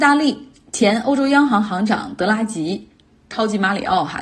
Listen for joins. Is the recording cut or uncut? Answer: uncut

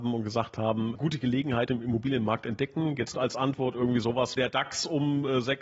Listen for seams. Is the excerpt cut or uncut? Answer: cut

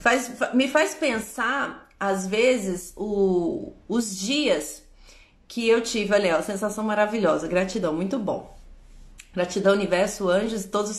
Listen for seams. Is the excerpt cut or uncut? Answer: uncut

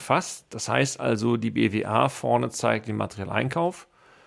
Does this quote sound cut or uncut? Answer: uncut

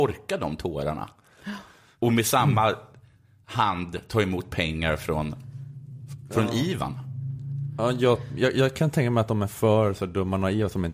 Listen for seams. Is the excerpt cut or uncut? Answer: uncut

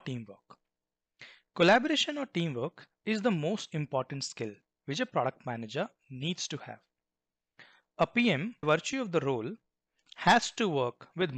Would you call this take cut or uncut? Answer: cut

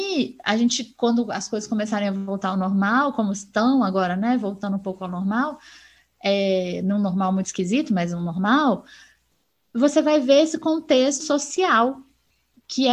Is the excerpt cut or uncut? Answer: cut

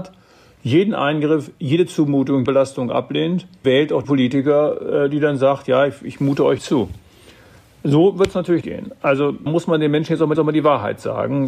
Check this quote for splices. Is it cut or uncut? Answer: cut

